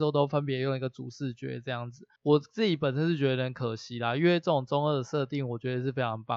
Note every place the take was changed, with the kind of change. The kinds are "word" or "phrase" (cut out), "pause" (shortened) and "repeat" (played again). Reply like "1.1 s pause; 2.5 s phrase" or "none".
2.2 s pause